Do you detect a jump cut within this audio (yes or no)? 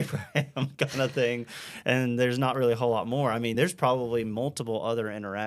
no